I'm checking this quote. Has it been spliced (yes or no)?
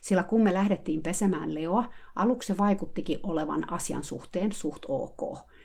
no